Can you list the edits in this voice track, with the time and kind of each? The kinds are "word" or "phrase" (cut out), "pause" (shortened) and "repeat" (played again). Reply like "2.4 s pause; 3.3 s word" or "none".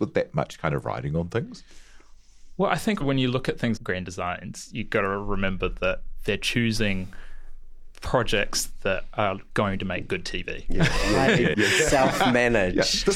3.0 s word; 3.8 s word; 11.5 s word